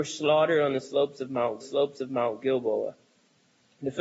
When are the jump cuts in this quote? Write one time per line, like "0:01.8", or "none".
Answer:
0:01.6